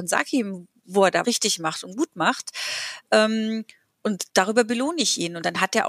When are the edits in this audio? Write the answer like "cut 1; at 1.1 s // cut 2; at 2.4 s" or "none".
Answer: cut 1; at 1.2 s // cut 2; at 4.3 s

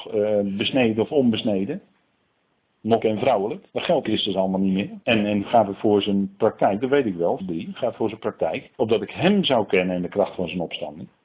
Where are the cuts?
cut 1; at 3.0 s // cut 2; at 3.7 s // cut 3; at 4.0 s // cut 4; at 5.0 s // cut 5; at 5.4 s // cut 6; at 7.4 s // cut 7; at 8.7 s

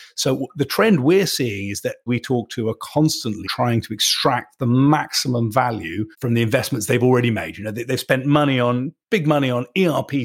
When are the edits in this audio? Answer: cut 1; at 2.1 s // cut 2; at 3.4 s // cut 3; at 6.1 s // cut 4; at 9.0 s

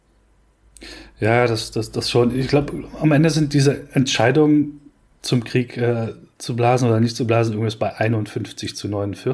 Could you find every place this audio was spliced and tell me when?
none

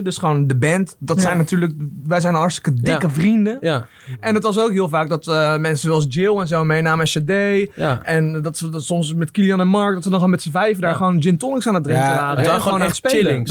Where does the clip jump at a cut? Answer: none

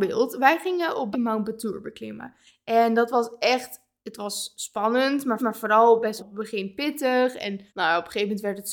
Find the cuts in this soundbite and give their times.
cut 1; at 1.1 s // cut 2; at 5.4 s // cut 3; at 6.2 s // cut 4; at 7.7 s

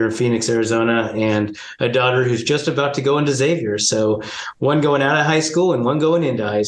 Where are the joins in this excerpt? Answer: none

